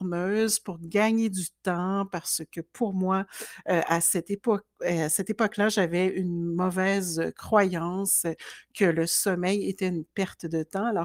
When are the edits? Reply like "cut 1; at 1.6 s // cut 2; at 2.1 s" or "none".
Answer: none